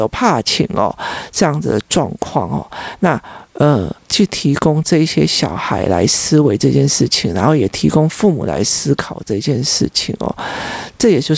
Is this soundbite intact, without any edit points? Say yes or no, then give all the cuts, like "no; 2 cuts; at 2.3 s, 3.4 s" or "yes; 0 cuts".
no; 1 cut; at 4.0 s